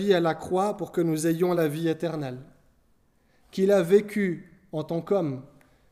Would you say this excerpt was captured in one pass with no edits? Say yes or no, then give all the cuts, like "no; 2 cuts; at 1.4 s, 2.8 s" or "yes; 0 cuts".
yes; 0 cuts